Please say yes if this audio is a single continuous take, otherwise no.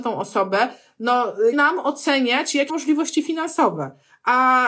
no